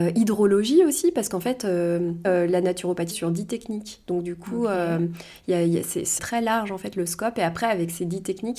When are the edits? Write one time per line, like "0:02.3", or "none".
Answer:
0:02.2
0:03.1
0:06.2